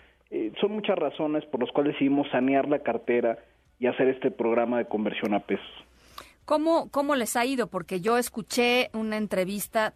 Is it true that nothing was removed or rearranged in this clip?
yes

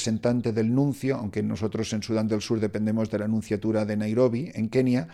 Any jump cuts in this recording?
no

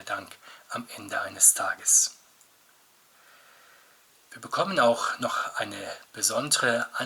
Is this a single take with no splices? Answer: yes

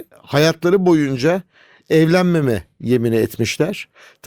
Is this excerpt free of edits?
yes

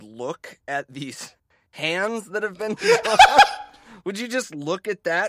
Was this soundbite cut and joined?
no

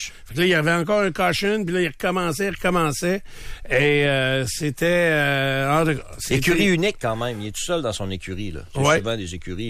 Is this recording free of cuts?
yes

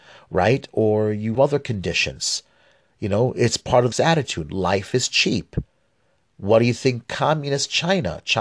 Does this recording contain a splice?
yes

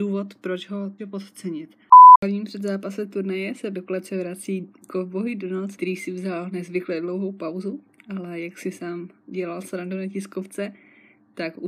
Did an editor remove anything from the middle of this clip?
yes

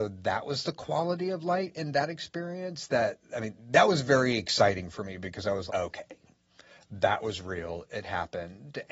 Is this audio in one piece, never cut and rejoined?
no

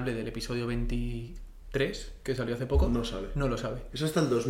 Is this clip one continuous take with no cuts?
yes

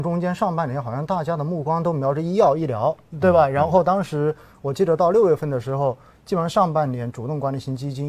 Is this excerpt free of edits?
yes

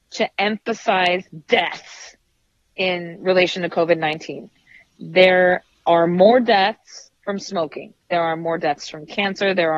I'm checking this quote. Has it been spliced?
no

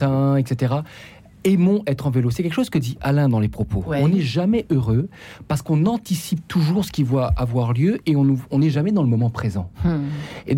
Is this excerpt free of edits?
yes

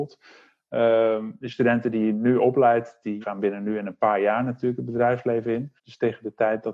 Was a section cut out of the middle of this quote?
yes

